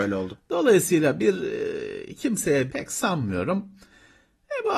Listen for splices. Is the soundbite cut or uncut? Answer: cut